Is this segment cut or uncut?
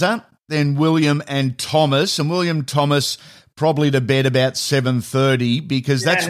uncut